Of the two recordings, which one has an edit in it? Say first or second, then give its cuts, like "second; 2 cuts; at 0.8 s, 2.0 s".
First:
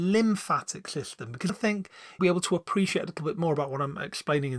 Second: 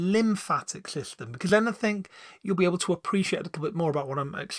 first; 2 cuts; at 1.5 s, 2.2 s